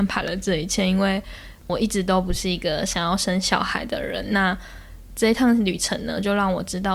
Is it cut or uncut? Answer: cut